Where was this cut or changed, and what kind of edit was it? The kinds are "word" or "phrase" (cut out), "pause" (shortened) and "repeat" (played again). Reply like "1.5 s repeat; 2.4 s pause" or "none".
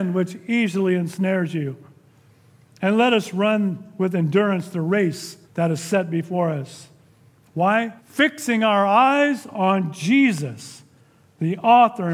5.4 s pause; 8.0 s pause